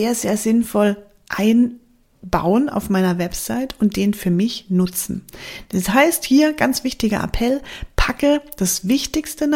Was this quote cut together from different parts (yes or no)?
no